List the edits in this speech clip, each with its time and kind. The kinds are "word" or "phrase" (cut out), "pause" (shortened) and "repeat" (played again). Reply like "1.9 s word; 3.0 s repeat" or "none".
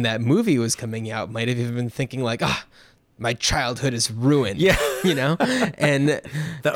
none